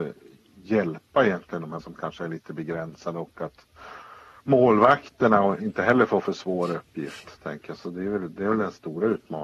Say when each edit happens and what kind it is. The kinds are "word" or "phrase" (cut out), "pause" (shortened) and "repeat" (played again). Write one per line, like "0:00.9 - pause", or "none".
0:01.8 - word